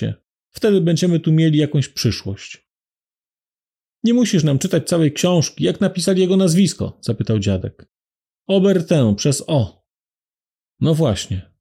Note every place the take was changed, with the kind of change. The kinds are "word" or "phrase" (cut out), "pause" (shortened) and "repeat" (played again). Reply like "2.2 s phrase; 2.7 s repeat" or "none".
none